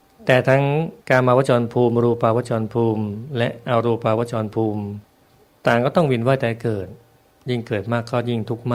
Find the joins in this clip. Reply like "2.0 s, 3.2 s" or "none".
none